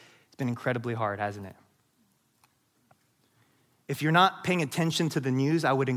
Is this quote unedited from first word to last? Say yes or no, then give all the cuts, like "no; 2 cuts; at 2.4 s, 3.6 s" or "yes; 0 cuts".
yes; 0 cuts